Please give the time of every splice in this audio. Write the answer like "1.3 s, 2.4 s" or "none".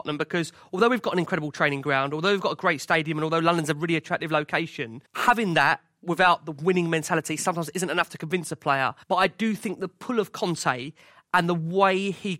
5.0 s, 9.0 s